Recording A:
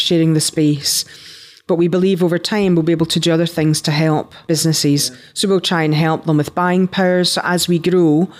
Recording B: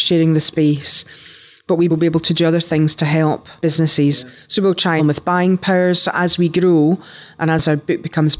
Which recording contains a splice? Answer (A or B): B